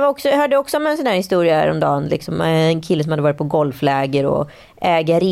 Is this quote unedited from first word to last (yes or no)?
yes